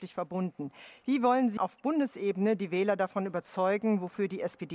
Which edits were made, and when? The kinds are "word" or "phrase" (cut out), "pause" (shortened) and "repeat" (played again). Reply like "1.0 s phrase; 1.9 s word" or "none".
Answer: 1.6 s word